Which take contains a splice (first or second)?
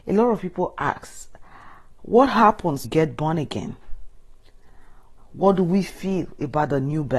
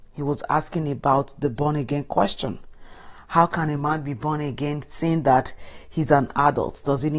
first